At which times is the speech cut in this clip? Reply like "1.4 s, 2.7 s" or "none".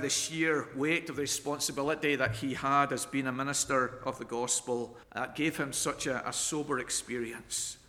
5.0 s